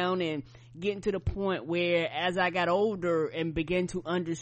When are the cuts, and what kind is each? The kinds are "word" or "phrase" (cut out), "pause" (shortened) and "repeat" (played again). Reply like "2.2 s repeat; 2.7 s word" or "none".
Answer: none